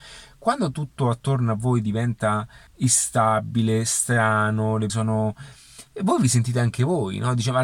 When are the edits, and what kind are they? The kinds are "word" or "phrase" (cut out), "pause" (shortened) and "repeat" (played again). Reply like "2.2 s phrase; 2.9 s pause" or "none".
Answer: 2.7 s pause; 4.9 s word